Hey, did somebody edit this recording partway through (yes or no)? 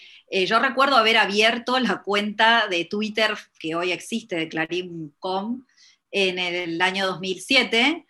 no